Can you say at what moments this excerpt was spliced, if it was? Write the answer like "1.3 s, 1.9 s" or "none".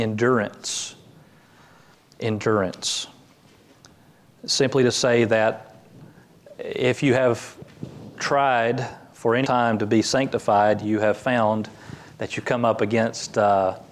9.4 s